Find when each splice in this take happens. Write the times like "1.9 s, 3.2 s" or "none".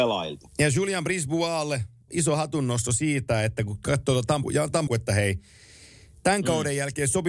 2.1 s, 4.4 s, 4.9 s